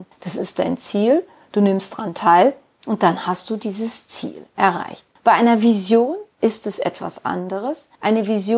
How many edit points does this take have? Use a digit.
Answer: 0